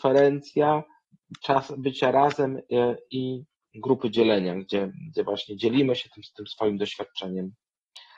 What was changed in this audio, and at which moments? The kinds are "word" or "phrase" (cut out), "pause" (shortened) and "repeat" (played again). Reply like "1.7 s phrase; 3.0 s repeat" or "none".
none